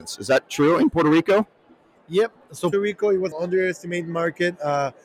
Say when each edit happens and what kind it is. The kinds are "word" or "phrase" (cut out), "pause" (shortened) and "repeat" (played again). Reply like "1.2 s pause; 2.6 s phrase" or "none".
2.7 s word; 3.3 s word